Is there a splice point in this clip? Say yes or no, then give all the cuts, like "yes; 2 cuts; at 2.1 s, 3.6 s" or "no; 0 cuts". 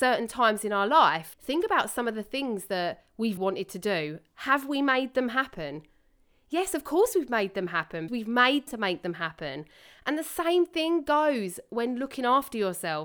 yes; 4 cuts; at 1.3 s, 3.4 s, 8.1 s, 8.7 s